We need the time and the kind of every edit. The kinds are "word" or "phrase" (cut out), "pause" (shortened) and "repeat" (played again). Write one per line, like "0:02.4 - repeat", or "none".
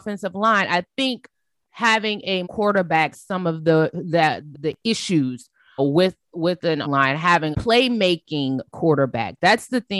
0:02.4 - word
0:03.1 - word
0:04.5 - word
0:05.8 - word
0:06.8 - word
0:07.5 - word